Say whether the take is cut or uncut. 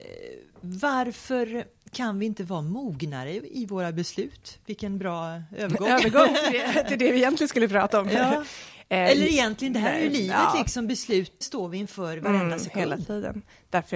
cut